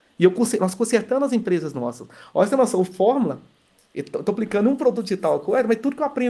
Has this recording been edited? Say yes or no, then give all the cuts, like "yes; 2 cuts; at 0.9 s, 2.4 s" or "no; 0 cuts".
no; 0 cuts